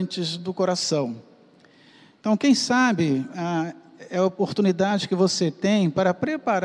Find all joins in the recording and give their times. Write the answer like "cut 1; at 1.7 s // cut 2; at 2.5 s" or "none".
none